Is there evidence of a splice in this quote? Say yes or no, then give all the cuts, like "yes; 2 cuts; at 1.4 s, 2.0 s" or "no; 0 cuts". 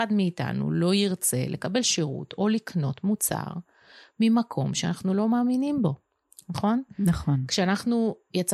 no; 0 cuts